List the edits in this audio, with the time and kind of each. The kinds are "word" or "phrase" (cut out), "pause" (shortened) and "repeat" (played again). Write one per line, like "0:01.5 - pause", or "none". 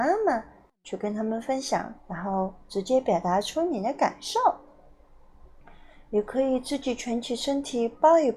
0:02.0 - phrase